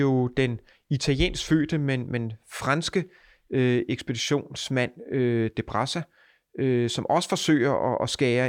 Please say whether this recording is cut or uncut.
uncut